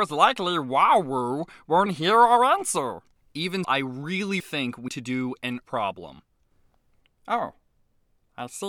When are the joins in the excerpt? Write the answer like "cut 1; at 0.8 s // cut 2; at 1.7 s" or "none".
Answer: cut 1; at 1.9 s // cut 2; at 3.6 s // cut 3; at 4.4 s // cut 4; at 4.9 s // cut 5; at 5.6 s